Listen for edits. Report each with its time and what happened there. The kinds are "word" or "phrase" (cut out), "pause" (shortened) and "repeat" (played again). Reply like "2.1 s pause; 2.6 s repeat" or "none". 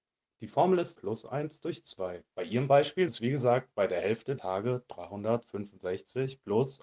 0.9 s phrase; 2.3 s pause; 3.1 s word; 4.4 s word